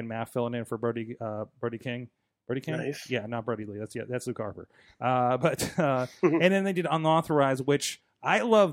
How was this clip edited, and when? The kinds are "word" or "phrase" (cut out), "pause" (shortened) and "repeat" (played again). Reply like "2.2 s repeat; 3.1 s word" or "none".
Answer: none